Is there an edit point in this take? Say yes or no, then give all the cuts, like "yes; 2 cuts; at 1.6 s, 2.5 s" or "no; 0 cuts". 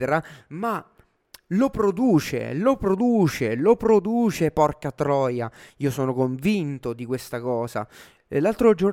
no; 0 cuts